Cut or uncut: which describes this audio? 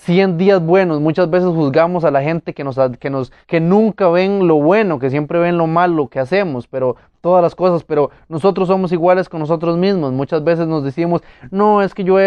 cut